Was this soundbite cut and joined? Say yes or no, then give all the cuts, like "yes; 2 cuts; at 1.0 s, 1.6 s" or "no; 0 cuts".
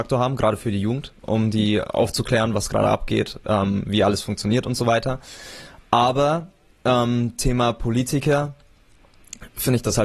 no; 0 cuts